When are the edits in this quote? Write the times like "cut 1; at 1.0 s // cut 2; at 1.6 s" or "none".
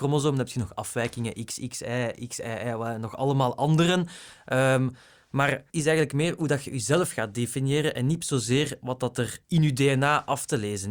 cut 1; at 5.7 s